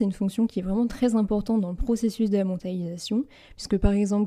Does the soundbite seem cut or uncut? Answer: uncut